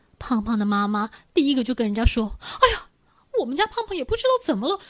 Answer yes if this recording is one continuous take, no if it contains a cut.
yes